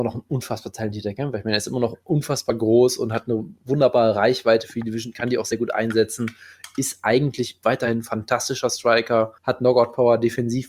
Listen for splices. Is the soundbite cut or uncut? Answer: cut